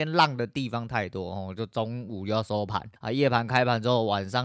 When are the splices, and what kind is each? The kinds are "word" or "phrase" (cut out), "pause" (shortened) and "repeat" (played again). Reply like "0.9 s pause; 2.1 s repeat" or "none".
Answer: 3.0 s pause